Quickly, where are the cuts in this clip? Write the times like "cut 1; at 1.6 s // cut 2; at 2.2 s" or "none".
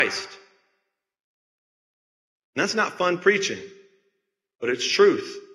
none